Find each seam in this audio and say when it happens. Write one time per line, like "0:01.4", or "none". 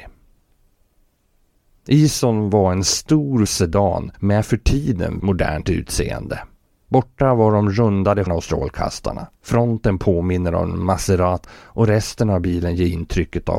0:03.5
0:04.1
0:05.2
0:06.6
0:08.3
0:09.3
0:11.4